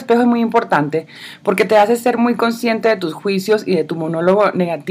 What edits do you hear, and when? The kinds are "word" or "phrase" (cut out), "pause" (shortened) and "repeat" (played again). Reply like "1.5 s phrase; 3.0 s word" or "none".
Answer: none